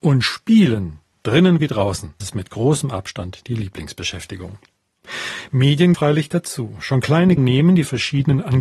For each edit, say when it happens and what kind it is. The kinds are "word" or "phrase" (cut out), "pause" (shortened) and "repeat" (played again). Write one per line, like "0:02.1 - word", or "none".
0:02.2 - word
0:05.9 - word
0:07.4 - word